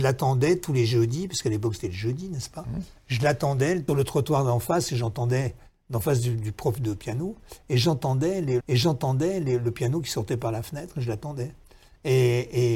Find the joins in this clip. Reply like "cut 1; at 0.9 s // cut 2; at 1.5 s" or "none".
cut 1; at 3.9 s // cut 2; at 8.6 s